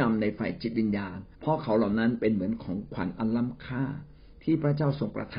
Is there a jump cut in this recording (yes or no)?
yes